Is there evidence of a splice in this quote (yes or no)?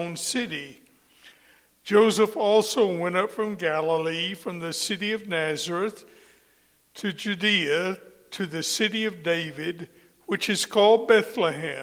no